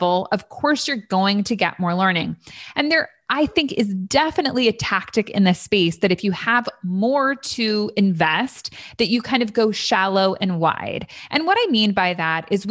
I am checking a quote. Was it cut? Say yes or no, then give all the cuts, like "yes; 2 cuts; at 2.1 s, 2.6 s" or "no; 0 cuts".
no; 0 cuts